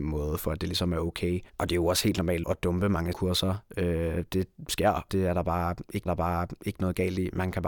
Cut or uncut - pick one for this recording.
cut